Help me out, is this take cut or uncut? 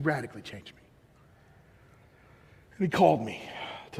uncut